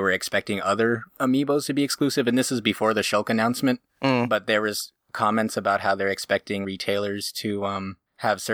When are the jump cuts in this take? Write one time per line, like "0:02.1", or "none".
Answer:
0:06.6